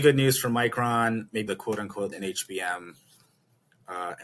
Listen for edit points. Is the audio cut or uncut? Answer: cut